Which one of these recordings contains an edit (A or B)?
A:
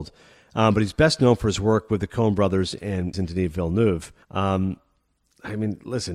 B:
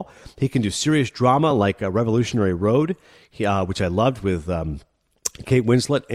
A